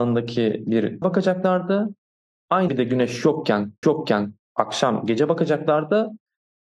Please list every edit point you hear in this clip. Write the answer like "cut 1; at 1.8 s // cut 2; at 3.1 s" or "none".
cut 1; at 1.0 s // cut 2; at 2.7 s // cut 3; at 3.8 s